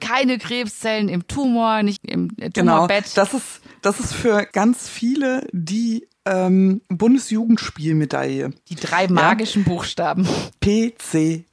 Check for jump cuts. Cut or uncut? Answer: cut